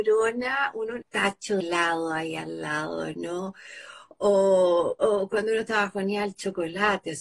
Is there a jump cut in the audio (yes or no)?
yes